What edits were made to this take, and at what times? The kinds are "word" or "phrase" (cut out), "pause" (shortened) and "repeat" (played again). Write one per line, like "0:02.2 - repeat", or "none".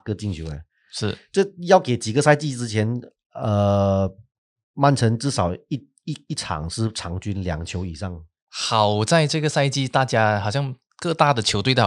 none